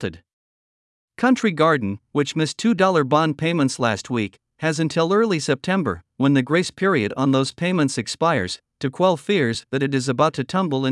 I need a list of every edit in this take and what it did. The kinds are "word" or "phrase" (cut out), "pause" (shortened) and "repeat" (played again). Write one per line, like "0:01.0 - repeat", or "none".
none

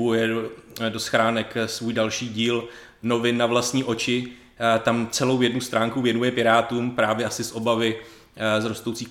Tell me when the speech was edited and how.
none

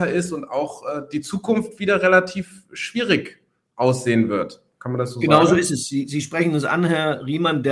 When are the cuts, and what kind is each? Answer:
none

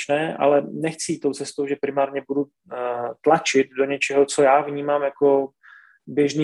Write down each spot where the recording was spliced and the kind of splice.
none

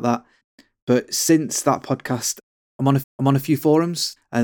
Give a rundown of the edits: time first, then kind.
0:03.0 - repeat

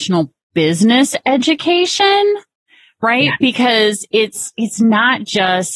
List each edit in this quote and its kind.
none

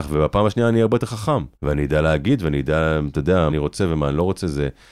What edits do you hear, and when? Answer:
0:01.5 - pause
0:03.5 - word

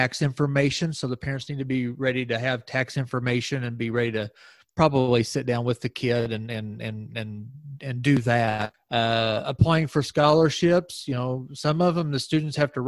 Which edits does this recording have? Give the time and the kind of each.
none

